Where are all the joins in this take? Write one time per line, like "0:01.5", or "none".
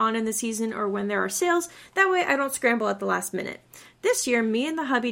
none